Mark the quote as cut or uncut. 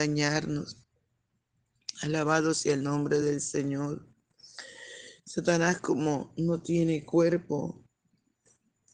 uncut